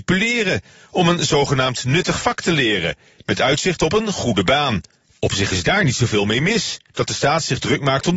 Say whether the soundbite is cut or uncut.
uncut